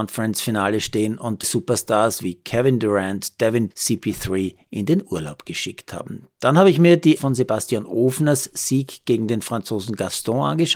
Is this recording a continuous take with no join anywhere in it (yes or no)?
no